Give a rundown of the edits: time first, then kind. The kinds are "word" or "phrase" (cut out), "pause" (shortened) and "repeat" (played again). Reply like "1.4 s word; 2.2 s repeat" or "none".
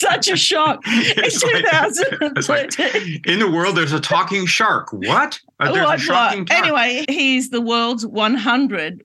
7.0 s word